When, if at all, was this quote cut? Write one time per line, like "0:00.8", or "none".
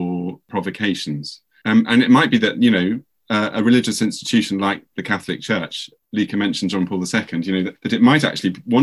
none